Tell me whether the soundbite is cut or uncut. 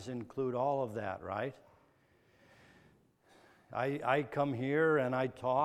uncut